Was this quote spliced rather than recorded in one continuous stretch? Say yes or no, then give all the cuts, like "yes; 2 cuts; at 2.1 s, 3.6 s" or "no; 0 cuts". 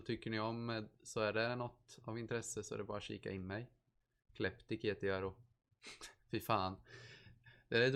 no; 0 cuts